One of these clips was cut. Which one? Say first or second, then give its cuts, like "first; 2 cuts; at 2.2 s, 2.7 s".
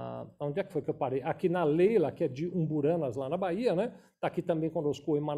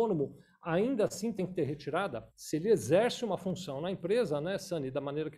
second; 1 cut; at 2.3 s